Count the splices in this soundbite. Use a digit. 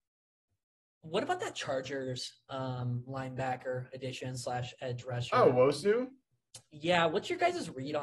0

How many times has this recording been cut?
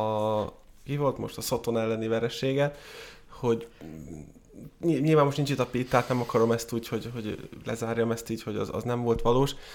0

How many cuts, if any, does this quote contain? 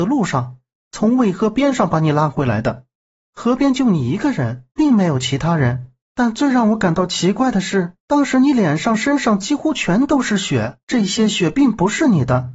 4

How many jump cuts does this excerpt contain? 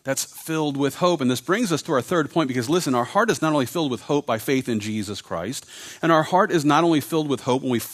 0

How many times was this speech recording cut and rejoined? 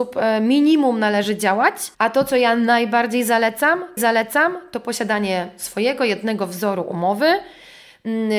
2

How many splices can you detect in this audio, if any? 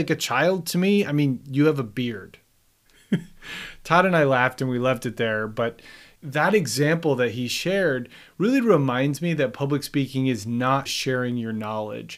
1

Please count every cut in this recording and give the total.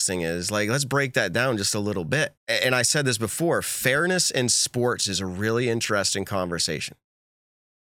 1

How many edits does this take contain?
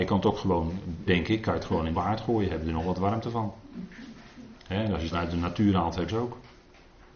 5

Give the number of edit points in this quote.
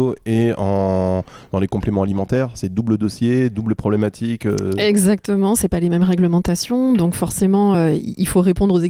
0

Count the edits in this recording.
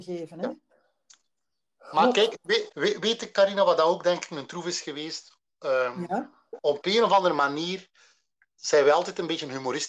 1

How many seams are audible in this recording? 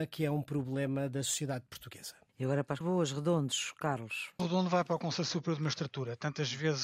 2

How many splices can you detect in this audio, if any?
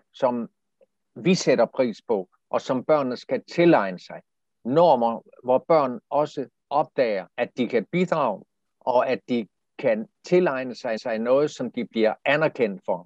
3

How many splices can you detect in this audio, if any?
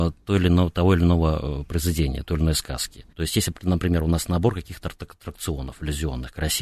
1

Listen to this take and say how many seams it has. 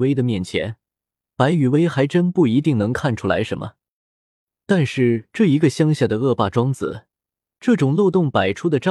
0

